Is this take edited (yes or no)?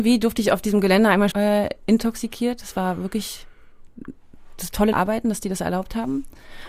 yes